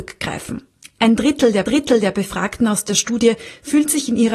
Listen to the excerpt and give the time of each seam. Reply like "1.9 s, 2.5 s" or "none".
1.7 s